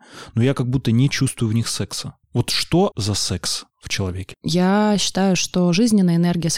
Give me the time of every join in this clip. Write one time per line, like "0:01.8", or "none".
0:02.2
0:02.9
0:03.7